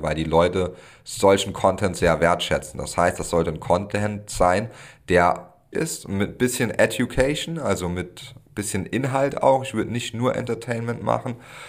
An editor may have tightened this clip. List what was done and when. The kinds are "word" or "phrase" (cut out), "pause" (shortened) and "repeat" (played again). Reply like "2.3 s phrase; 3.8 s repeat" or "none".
5.7 s phrase

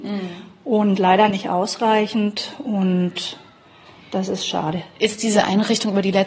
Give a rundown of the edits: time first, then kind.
none

